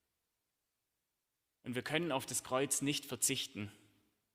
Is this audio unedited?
yes; 0 cuts

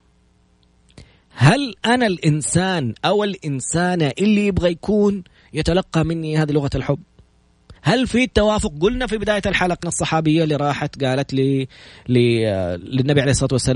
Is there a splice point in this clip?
yes; 2 cuts; at 7.8 s, 9.8 s

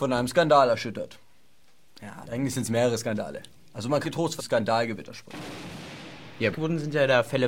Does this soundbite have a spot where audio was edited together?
yes; 5 cuts; at 2.2 s, 3.6 s, 4.0 s, 4.4 s, 6.5 s

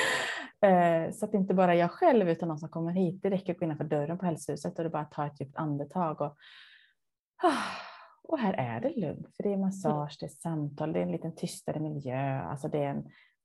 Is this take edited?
no; 0 cuts

